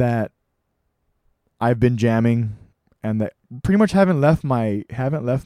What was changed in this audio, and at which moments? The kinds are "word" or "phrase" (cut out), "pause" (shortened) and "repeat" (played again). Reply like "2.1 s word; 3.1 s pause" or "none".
2.7 s pause

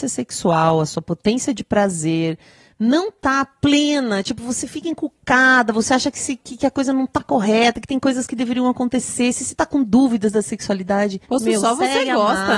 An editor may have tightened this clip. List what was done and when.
11.2 s pause

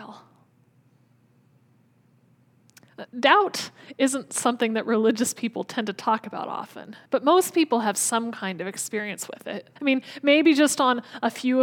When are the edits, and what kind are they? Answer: 3.1 s pause; 7.1 s pause; 9.8 s pause

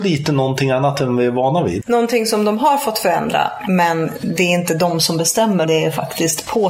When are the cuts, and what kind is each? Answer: 5.6 s word

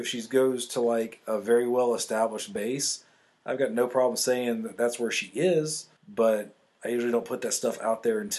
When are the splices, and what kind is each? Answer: 6.0 s pause

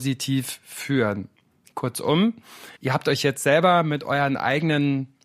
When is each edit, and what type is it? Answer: 2.8 s pause

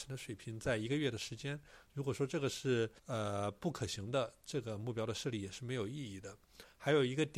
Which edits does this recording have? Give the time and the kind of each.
3.0 s pause

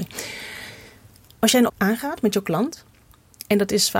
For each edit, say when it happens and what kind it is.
1.7 s word

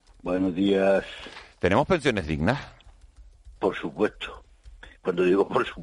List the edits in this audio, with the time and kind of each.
3.6 s pause

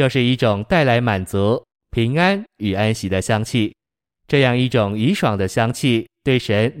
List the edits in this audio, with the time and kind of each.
none

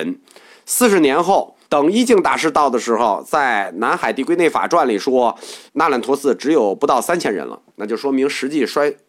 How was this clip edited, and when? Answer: 1.6 s pause; 5.7 s pause; 7.7 s pause

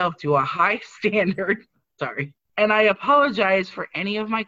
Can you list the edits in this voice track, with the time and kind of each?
none

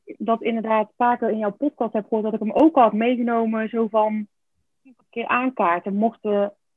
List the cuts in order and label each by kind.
5.0 s word

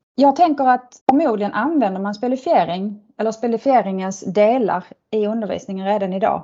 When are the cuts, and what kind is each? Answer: 1.0 s pause

